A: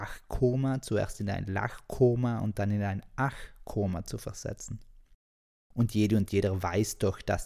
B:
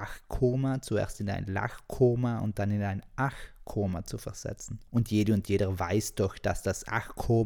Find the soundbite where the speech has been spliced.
B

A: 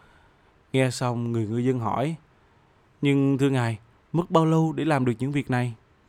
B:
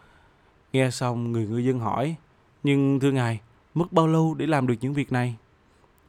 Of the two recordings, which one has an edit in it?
B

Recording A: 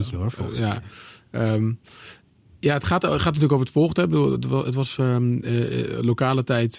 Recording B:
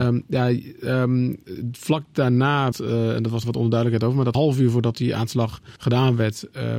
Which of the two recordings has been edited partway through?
B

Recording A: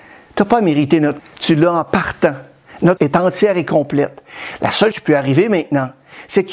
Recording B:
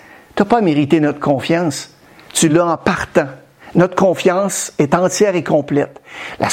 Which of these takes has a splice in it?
A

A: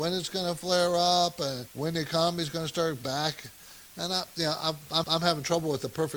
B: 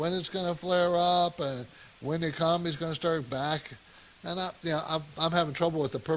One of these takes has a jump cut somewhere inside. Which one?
A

